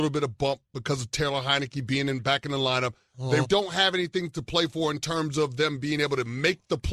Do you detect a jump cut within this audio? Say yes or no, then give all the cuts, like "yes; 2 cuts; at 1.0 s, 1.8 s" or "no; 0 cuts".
yes; 1 cut; at 3.4 s